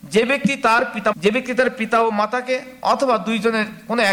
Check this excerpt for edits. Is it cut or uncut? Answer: cut